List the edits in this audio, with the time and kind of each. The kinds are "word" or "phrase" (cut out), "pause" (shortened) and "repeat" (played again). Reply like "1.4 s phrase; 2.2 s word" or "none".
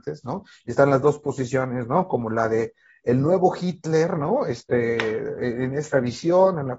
none